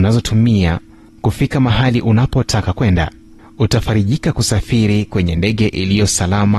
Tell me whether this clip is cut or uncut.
cut